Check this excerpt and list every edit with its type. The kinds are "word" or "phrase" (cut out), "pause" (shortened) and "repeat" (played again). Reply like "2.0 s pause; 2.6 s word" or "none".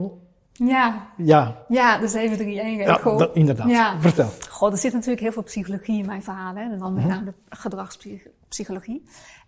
none